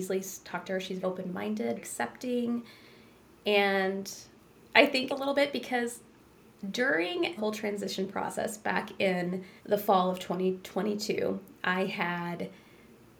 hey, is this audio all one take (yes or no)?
no